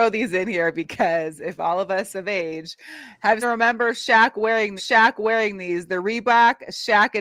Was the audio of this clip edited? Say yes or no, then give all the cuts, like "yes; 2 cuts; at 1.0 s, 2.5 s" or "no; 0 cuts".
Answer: yes; 2 cuts; at 3.4 s, 4.8 s